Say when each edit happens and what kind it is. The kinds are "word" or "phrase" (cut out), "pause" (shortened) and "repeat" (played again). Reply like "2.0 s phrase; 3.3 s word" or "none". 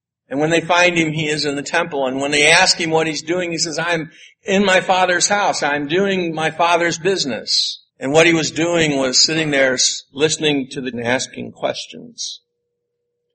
7.9 s pause; 10.9 s phrase